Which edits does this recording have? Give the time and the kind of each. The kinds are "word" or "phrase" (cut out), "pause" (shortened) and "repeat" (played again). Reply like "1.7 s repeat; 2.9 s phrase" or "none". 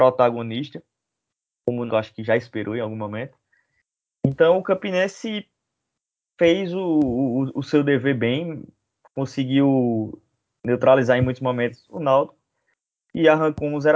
1.9 s word

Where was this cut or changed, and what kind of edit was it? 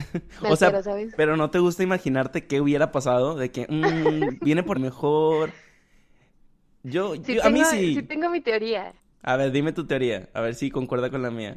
4.7 s phrase

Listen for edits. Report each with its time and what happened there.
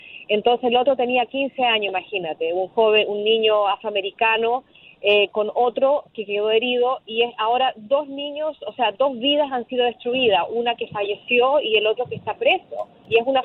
none

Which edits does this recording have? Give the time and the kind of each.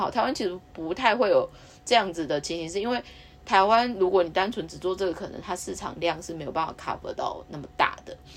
none

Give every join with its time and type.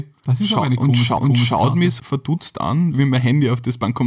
1.2 s repeat; 2.0 s word; 2.9 s word

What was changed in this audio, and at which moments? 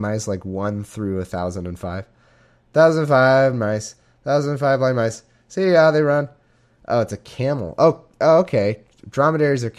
3.5 s word

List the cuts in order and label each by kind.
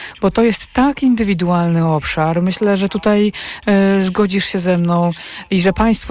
none

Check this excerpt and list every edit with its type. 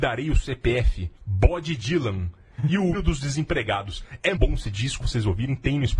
1.2 s pause; 2.9 s word; 4.4 s word; 5.0 s word

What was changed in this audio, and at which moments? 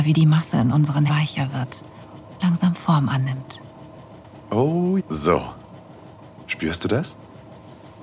1.1 s word; 2.4 s word; 5.0 s word

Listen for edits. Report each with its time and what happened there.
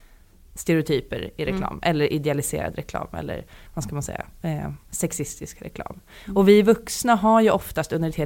none

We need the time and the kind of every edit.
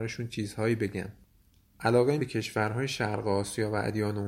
2.2 s word

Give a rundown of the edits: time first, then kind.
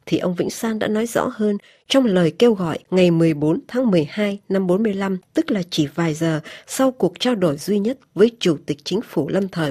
none

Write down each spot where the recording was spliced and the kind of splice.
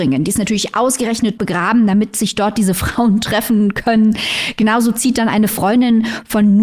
1.4 s word

